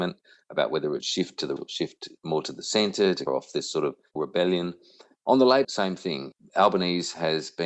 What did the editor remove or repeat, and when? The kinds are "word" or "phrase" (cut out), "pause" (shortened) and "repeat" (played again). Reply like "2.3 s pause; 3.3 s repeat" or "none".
1.0 s word; 1.6 s word; 3.3 s word; 4.2 s word; 5.6 s word